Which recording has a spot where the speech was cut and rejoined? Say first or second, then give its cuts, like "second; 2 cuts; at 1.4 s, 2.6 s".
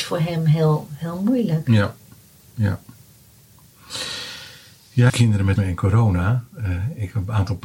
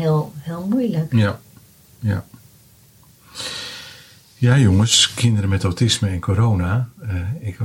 first; 2 cuts; at 5.1 s, 5.6 s